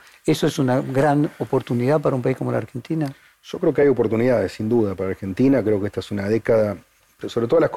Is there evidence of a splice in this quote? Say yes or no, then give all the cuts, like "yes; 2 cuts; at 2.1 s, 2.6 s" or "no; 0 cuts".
no; 0 cuts